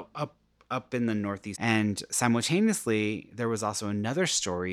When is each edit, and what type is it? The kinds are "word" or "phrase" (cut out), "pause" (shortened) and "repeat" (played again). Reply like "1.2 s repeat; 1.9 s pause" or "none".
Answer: 1.5 s word